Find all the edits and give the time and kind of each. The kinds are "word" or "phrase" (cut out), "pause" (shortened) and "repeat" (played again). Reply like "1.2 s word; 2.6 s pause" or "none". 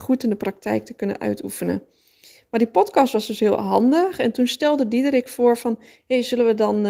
none